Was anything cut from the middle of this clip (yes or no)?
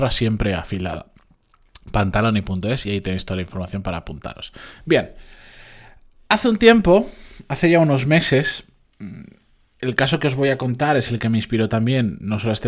no